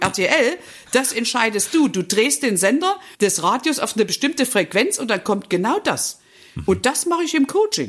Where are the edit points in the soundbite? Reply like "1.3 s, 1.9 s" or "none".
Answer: 3.1 s